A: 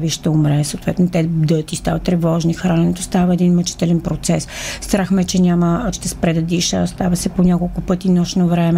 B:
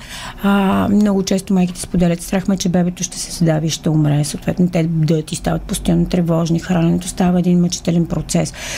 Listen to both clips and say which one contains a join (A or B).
A